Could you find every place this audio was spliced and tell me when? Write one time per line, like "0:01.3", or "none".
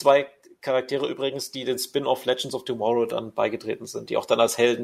none